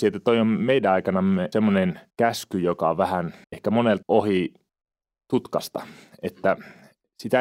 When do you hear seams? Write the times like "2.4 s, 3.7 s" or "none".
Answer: 1.5 s, 2.1 s, 3.4 s, 4.0 s, 4.7 s